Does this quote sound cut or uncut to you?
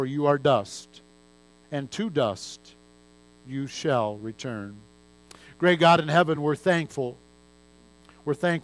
uncut